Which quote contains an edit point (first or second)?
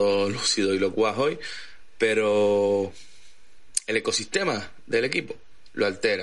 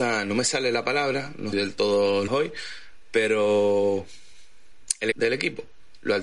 second